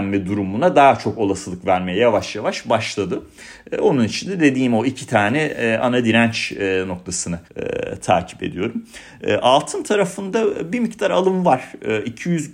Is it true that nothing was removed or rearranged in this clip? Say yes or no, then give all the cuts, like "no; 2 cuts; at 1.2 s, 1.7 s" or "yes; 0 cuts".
no; 1 cut; at 7.4 s